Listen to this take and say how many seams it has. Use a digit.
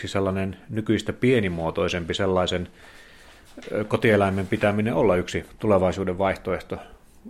0